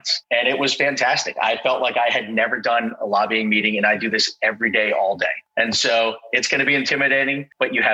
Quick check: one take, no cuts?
yes; 0 cuts

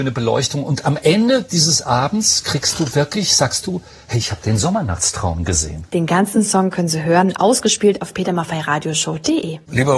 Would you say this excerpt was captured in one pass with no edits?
yes; 0 cuts

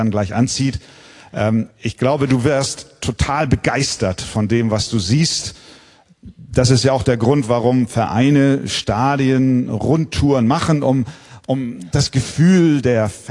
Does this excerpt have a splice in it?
yes; 1 cut; at 1.7 s

